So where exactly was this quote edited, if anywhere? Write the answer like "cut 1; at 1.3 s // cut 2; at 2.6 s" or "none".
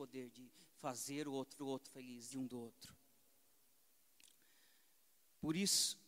cut 1; at 1.6 s // cut 2; at 2.3 s